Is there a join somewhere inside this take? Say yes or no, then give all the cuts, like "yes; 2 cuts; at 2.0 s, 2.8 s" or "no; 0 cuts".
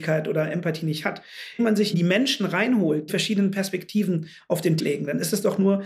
yes; 4 cuts; at 1.6 s, 1.9 s, 3.1 s, 4.8 s